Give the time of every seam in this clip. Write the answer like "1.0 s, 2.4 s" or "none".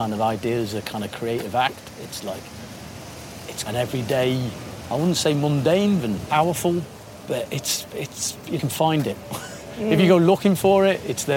3.7 s, 6.0 s, 8.6 s